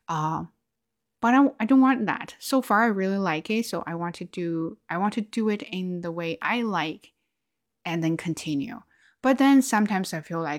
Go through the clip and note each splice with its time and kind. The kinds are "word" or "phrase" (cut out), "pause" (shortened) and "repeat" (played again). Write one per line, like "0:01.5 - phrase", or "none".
none